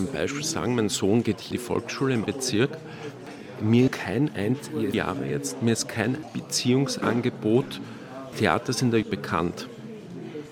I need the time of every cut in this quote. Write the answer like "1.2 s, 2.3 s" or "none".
1.5 s, 2.3 s, 3.9 s, 4.9 s, 6.2 s, 8.3 s, 9.0 s